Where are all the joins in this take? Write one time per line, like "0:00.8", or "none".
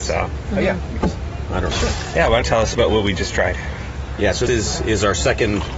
0:01.0
0:01.7
0:02.4
0:04.5

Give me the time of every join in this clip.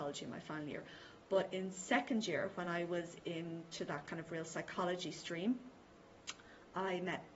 none

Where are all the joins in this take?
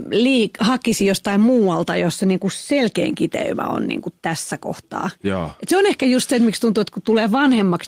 none

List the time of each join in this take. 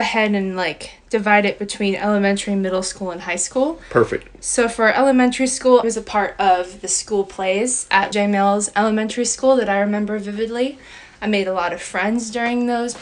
0:05.8
0:08.1

